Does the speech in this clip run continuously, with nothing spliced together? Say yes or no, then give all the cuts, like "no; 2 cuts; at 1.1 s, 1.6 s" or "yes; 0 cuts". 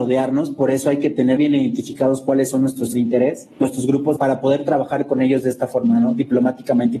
no; 4 cuts; at 1.4 s, 2.9 s, 3.5 s, 4.2 s